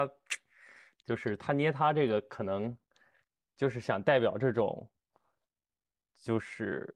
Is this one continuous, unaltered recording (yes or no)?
yes